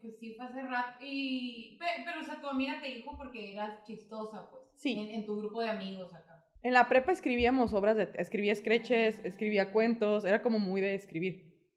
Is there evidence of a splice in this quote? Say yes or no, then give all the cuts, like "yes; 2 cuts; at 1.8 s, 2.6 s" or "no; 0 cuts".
yes; 1 cut; at 6.6 s